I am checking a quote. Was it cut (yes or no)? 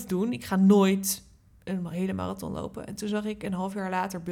no